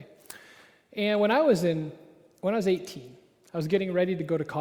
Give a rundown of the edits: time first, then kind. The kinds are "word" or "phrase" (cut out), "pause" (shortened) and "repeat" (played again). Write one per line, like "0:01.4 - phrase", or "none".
none